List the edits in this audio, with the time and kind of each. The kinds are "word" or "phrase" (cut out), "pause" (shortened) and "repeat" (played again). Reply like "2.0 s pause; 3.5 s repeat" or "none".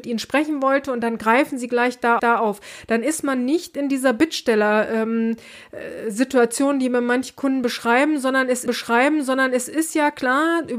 2.2 s repeat; 8.7 s repeat